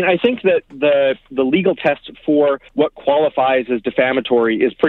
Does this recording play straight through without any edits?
no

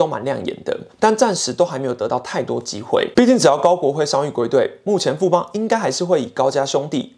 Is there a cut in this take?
yes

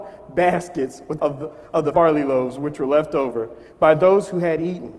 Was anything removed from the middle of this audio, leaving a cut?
yes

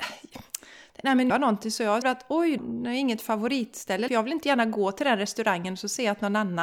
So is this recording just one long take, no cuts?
no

